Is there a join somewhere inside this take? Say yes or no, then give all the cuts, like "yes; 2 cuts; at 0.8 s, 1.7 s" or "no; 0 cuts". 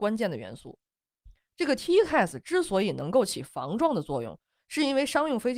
no; 0 cuts